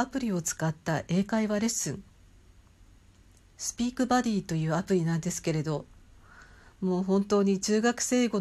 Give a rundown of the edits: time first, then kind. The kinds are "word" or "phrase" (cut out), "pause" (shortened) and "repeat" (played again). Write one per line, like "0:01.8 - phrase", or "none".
none